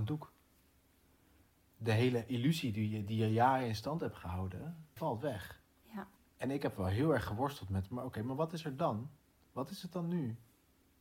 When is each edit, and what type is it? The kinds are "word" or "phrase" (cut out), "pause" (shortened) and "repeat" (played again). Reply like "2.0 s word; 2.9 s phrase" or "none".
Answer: 5.0 s word; 6.2 s pause